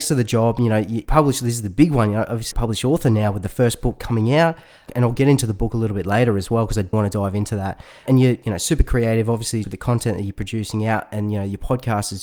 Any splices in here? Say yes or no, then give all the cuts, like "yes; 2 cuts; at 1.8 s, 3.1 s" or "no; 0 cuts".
yes; 3 cuts; at 2.5 s, 6.9 s, 9.6 s